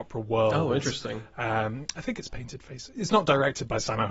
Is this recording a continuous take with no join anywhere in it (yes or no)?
yes